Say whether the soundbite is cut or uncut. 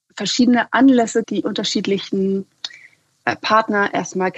cut